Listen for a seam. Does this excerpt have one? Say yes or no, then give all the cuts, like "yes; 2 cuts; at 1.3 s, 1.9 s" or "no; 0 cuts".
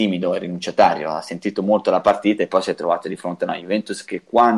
no; 0 cuts